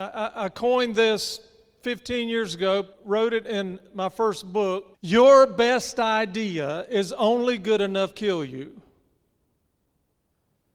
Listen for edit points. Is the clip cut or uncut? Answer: cut